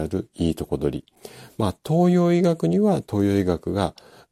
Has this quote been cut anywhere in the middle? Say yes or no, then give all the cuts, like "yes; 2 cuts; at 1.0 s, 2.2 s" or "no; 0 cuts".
no; 0 cuts